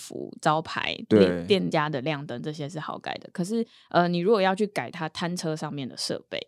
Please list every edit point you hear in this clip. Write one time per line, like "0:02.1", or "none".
none